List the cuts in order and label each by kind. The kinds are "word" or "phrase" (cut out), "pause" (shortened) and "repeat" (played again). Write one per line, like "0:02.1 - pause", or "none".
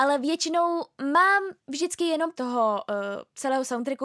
0:01.6 - pause
0:02.4 - phrase